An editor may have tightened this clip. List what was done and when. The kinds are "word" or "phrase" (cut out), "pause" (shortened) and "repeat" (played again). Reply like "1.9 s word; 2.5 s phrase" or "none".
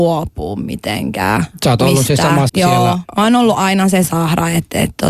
2.5 s word; 4.0 s word